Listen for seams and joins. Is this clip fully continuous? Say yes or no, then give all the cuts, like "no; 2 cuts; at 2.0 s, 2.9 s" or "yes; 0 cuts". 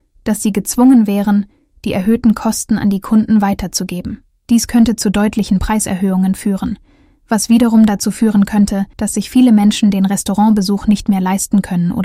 no; 2 cuts; at 4.3 s, 8.9 s